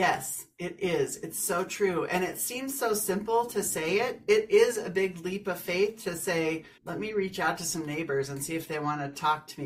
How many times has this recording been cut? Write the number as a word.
one